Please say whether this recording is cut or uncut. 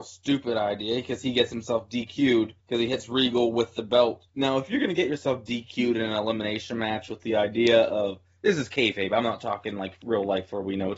cut